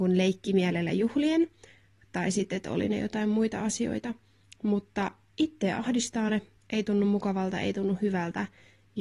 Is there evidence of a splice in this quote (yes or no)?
no